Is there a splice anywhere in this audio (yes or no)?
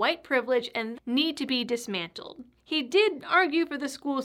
yes